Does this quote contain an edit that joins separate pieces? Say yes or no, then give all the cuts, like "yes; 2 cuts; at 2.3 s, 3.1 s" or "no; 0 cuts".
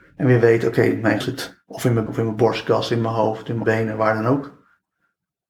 yes; 3 cuts; at 1.2 s, 2.1 s, 3.6 s